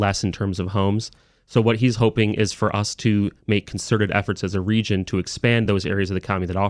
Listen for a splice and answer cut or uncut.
uncut